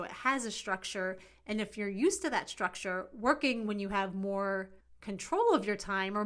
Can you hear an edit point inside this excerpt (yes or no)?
no